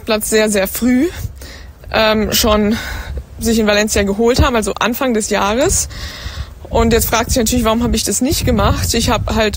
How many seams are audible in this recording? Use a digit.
0